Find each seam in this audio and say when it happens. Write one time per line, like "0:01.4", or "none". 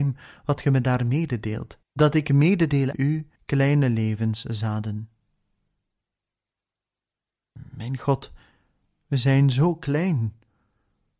0:01.8
0:02.9
0:03.4